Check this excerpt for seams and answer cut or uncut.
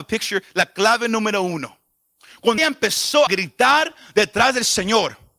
cut